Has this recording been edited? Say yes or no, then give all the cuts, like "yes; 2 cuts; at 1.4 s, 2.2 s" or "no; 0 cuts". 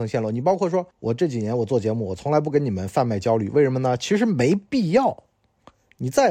yes; 1 cut; at 0.9 s